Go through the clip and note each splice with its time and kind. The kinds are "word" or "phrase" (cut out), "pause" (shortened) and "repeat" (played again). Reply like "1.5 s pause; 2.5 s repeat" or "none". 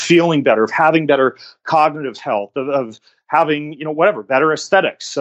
none